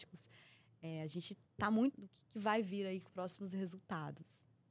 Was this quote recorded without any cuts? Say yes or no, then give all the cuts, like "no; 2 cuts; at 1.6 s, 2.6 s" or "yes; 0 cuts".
no; 3 cuts; at 1.4 s, 1.9 s, 3.1 s